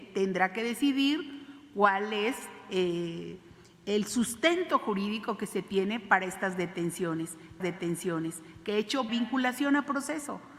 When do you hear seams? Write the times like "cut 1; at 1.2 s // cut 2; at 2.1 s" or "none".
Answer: cut 1; at 7.6 s // cut 2; at 9.1 s